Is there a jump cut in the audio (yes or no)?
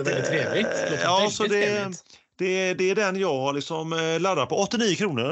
no